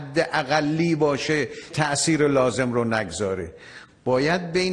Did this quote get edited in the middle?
yes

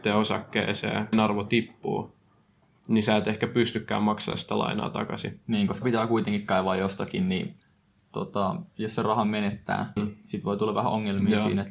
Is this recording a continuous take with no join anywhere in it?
no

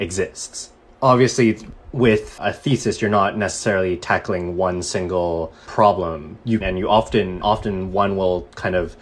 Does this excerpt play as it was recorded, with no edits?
no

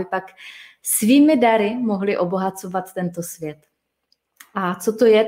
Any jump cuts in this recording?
no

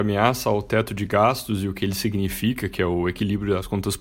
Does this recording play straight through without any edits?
yes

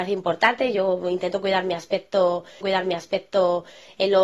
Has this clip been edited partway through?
yes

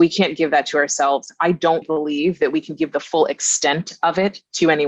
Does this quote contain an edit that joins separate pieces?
yes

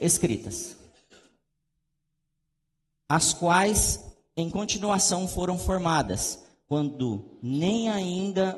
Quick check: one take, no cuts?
yes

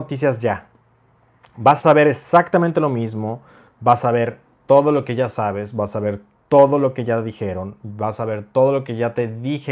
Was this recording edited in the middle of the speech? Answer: no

